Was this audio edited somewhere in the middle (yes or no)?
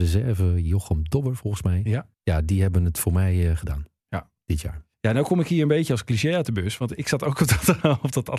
yes